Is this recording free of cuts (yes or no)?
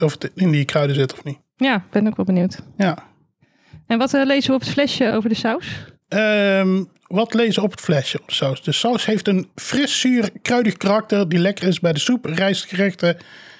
no